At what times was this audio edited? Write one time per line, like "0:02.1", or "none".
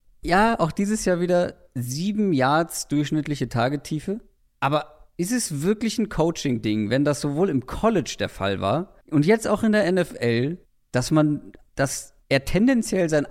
0:04.4
0:09.0
0:10.6
0:12.2